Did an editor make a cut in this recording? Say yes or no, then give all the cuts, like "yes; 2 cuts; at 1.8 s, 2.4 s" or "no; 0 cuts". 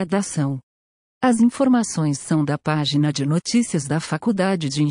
no; 0 cuts